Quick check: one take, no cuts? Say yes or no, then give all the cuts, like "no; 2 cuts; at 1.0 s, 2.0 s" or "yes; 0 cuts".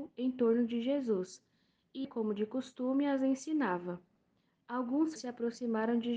no; 2 cuts; at 2.0 s, 5.2 s